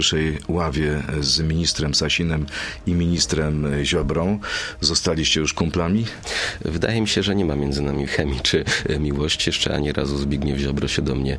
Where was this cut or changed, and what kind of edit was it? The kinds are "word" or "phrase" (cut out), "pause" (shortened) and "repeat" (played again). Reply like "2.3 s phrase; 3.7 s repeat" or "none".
8.1 s word